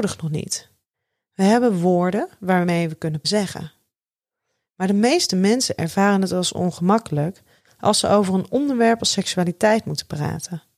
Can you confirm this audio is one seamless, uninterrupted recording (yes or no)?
no